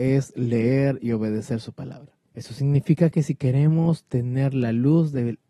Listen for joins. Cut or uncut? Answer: cut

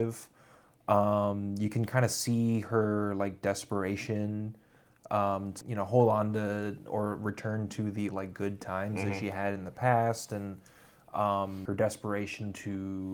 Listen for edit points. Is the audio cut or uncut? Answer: cut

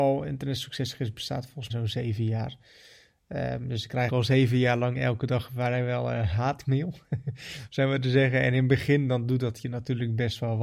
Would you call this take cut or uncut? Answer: cut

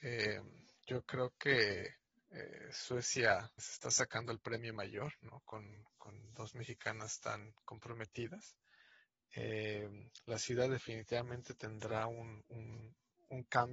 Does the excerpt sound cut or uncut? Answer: cut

